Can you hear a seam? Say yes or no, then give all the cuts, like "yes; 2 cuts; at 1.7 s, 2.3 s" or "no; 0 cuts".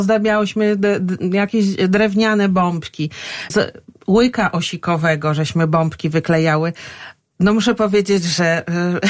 no; 0 cuts